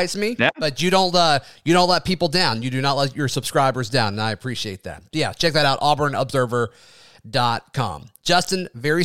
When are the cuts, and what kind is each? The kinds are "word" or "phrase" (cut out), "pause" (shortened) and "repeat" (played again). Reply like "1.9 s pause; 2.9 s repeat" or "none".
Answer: none